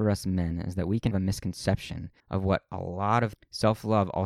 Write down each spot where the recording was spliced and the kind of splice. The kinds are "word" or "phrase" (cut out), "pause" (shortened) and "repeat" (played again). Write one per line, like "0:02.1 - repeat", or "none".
0:01.1 - word
0:02.2 - pause
0:03.3 - phrase